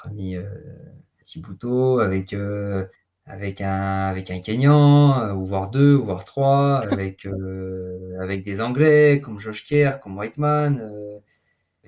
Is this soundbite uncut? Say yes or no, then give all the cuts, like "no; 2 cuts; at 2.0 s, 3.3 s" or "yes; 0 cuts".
no; 1 cut; at 3.0 s